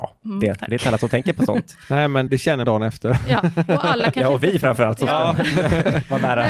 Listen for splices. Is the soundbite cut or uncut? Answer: cut